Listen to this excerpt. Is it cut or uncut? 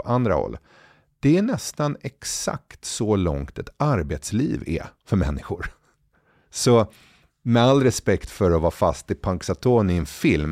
uncut